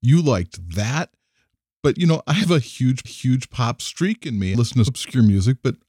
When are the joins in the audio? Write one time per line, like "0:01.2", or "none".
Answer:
0:03.0
0:04.5
0:04.9